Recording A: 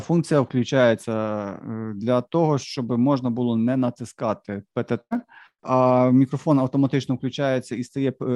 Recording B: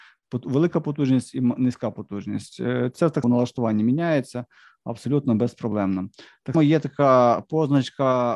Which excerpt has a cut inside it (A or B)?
B